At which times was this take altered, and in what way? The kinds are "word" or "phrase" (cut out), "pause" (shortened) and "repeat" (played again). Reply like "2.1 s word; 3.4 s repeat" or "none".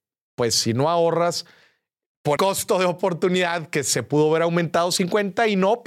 2.4 s word